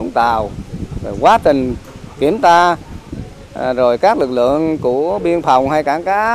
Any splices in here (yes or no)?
no